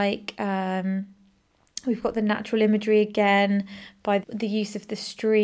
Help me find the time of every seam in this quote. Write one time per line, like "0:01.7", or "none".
0:04.2